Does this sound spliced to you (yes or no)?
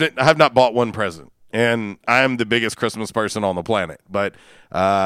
no